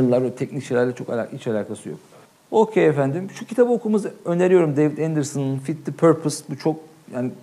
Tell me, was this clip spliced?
yes; 1 cut; at 2.2 s

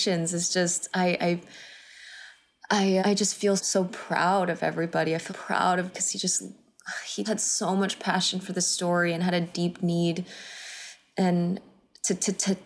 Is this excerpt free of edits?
no; 5 cuts; at 3.0 s, 3.6 s, 5.3 s, 5.9 s, 7.2 s

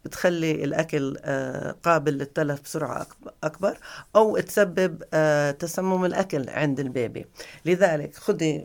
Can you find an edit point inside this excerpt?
no; 0 cuts

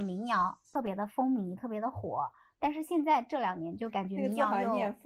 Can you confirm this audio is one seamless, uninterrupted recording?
yes; 0 cuts

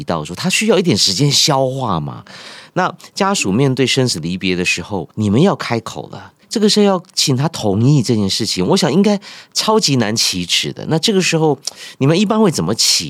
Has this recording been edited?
yes; 2 cuts; at 5.1 s, 6.4 s

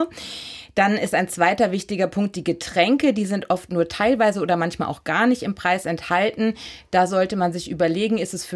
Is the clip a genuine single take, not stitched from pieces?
yes; 0 cuts

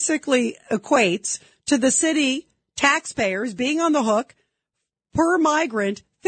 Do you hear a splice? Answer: no; 0 cuts

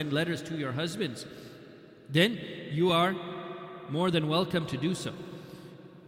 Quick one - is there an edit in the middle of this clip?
no; 0 cuts

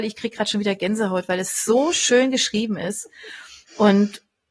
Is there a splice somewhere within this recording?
no; 0 cuts

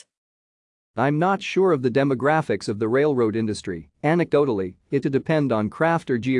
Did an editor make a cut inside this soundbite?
yes; 2 cuts; at 3.9 s, 5.0 s

